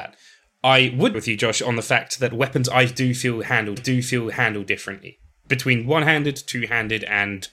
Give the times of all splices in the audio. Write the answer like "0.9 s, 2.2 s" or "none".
1.1 s, 3.8 s